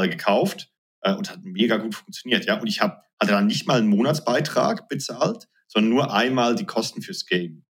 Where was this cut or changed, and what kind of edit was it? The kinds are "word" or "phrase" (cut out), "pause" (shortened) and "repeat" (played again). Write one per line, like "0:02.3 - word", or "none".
none